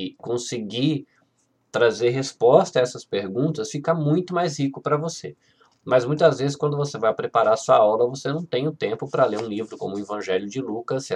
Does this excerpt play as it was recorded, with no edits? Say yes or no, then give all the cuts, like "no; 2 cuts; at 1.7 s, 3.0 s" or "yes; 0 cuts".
yes; 0 cuts